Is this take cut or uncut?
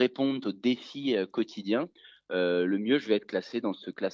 uncut